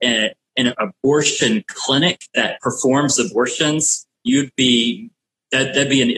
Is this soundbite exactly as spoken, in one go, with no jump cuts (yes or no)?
no